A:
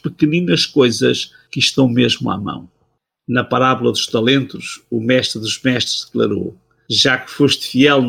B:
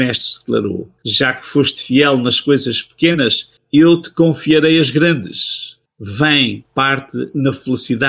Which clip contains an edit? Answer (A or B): B